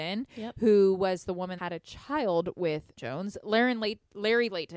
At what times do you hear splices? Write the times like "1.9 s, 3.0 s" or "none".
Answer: 1.6 s, 3.0 s